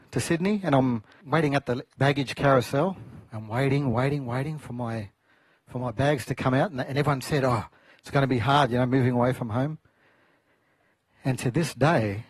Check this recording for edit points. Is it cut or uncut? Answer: uncut